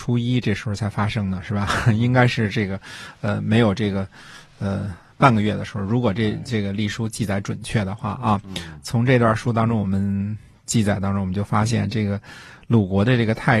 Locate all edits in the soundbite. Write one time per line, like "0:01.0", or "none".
none